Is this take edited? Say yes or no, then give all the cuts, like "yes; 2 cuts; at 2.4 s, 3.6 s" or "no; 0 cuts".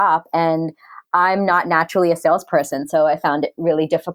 no; 0 cuts